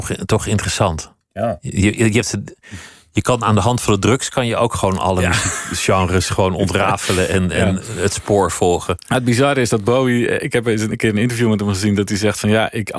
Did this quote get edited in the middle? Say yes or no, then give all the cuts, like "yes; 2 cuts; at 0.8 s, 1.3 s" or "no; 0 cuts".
no; 0 cuts